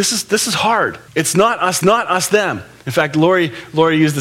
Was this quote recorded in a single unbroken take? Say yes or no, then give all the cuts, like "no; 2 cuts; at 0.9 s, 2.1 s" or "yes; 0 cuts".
no; 2 cuts; at 1.1 s, 1.8 s